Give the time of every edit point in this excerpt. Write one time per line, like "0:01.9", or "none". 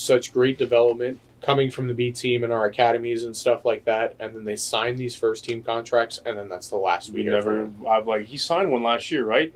0:01.3